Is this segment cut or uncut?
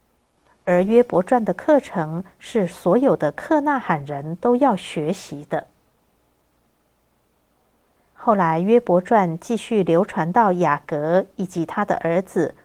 uncut